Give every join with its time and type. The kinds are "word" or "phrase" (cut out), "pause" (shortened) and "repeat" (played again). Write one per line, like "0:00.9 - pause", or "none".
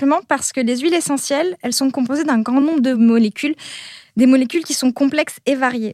none